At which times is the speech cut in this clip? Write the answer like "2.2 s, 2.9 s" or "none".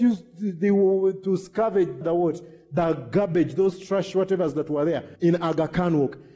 2.0 s, 5.2 s